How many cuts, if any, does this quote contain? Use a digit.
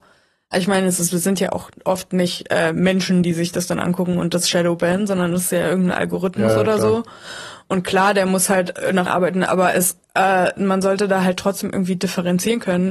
1